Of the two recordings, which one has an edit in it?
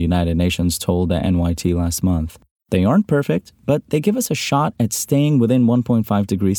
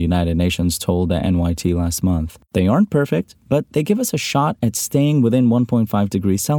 second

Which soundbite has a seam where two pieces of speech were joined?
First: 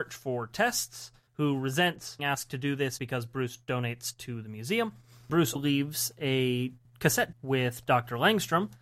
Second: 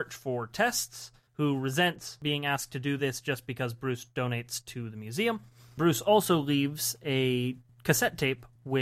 first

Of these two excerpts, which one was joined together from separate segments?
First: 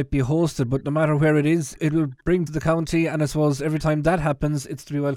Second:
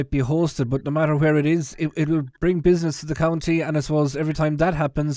first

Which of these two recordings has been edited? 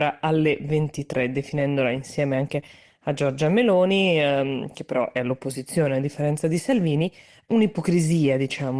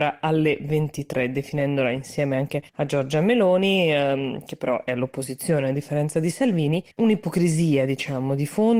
second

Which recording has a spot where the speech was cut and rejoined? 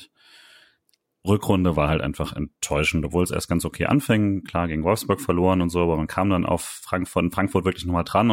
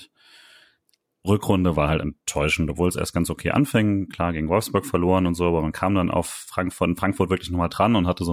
second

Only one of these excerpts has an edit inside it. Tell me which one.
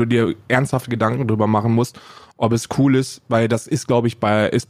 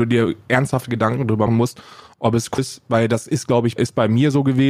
second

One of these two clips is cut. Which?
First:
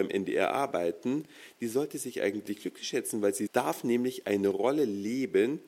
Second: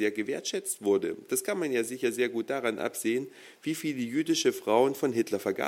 first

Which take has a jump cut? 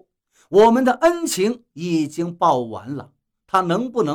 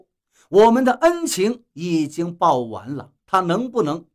second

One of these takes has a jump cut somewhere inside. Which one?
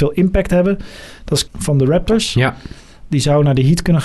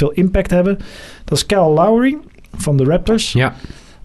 first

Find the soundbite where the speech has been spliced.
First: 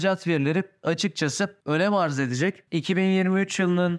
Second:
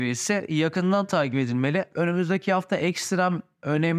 first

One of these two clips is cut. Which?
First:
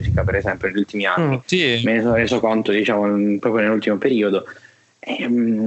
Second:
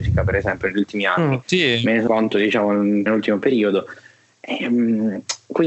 second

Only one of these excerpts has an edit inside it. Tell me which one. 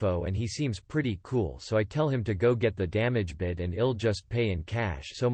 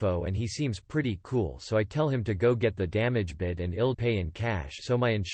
second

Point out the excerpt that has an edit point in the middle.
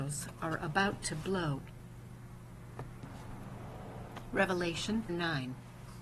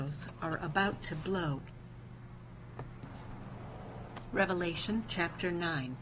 first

